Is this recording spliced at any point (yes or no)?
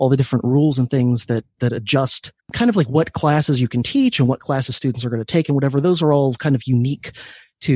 yes